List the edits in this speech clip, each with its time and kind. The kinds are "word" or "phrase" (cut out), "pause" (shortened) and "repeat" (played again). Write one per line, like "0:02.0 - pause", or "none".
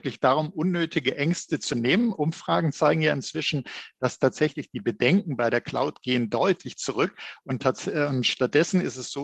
none